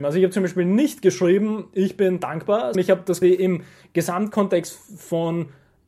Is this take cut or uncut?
cut